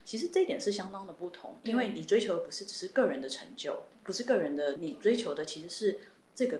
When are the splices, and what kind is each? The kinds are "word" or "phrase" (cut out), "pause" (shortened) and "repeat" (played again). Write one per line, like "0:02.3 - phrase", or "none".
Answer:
0:04.8 - word